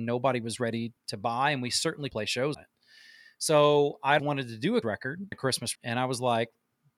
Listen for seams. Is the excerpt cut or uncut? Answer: cut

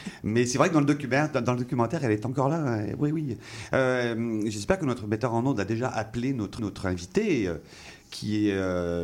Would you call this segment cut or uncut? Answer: cut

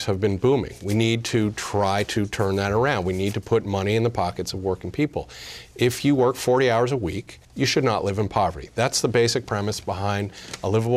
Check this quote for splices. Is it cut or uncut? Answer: cut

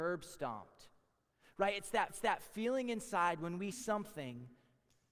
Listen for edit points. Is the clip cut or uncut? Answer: cut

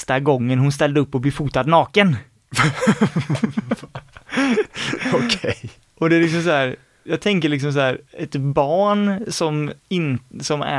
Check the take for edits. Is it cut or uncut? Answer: uncut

